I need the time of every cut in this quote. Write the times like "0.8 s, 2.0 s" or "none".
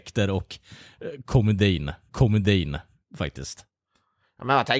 2.1 s